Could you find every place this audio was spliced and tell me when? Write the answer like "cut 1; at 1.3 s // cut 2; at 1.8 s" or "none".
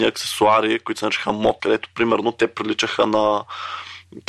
cut 1; at 1.6 s